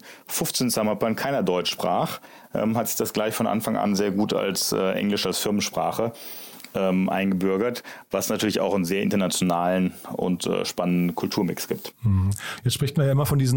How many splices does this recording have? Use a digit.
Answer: 0